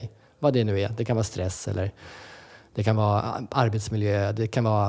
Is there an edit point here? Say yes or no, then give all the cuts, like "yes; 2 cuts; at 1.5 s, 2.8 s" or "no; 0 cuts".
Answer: no; 0 cuts